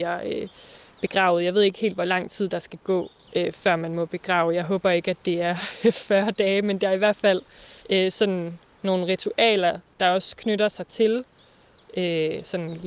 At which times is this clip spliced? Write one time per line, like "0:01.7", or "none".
0:03.2
0:07.8
0:08.7